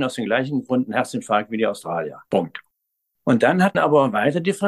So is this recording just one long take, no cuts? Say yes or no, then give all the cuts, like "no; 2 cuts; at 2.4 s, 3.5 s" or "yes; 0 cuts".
no; 2 cuts; at 2.3 s, 3.7 s